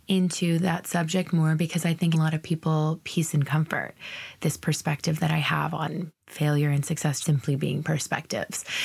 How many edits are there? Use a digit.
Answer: 3